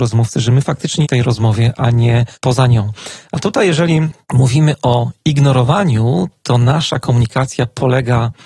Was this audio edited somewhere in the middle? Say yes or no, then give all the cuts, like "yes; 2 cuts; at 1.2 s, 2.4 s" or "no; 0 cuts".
yes; 3 cuts; at 1.0 s, 2.3 s, 4.2 s